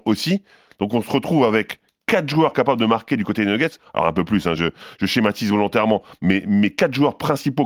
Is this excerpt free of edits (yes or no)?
yes